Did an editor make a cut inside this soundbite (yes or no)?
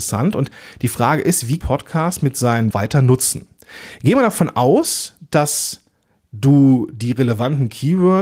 yes